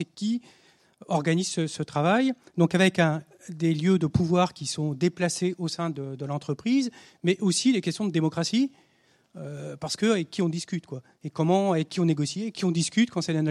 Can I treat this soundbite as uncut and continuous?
yes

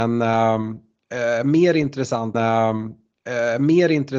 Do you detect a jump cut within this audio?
yes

